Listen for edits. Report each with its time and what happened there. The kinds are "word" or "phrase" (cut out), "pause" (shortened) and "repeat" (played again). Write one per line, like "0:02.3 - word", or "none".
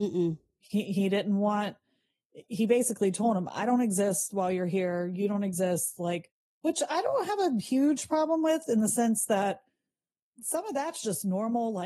none